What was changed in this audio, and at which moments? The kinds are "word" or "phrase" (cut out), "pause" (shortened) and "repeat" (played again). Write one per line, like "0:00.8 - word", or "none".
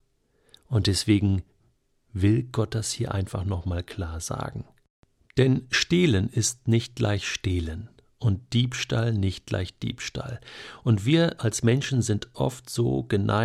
none